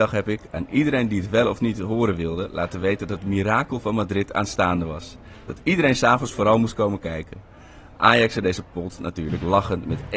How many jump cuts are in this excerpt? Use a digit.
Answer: 0